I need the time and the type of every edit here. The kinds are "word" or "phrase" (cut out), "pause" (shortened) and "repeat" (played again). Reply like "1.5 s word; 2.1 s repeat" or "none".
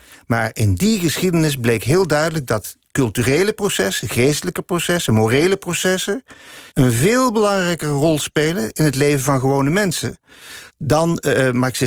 6.7 s pause; 10.7 s pause